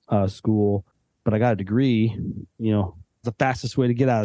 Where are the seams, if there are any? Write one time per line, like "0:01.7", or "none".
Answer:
0:03.2